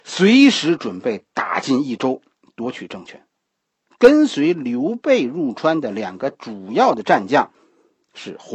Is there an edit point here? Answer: no; 0 cuts

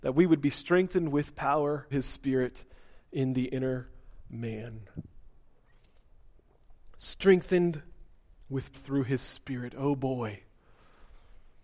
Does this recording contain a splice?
yes; 2 cuts; at 1.9 s, 8.7 s

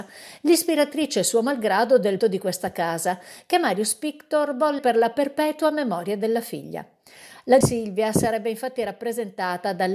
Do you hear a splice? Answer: yes; 3 cuts; at 2.2 s, 4.8 s, 7.6 s

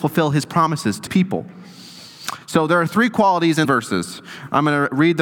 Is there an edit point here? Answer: yes; 2 cuts; at 1.1 s, 3.6 s

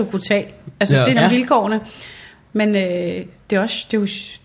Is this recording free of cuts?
no; 1 cut; at 1.1 s

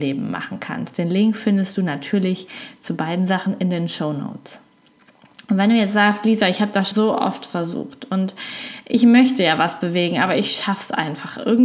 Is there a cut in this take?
yes; 1 cut; at 6.9 s

